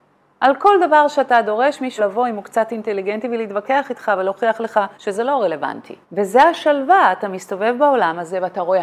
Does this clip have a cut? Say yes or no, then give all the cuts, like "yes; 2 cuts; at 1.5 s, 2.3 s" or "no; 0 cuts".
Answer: yes; 3 cuts; at 2.0 s, 4.9 s, 6.0 s